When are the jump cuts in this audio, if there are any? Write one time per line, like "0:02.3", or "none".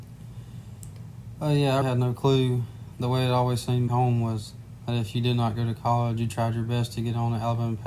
0:01.8
0:03.9